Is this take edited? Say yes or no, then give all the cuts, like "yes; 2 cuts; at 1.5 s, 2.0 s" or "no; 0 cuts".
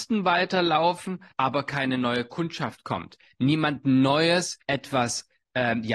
yes; 2 cuts; at 1.3 s, 4.6 s